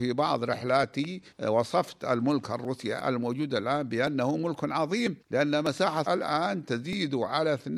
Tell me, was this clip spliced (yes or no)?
yes